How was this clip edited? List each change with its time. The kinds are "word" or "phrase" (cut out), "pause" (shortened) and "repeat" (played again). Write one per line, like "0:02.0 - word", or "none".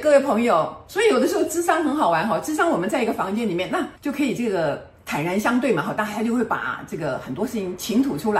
0:04.0 - pause